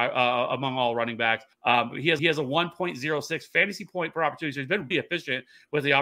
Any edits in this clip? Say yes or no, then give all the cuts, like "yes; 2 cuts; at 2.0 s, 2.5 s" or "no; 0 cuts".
yes; 3 cuts; at 1.5 s, 2.2 s, 4.9 s